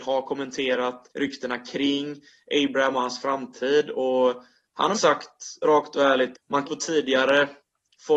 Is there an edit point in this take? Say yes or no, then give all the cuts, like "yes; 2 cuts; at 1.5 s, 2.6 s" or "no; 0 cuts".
yes; 4 cuts; at 1.1 s, 4.9 s, 6.3 s, 6.6 s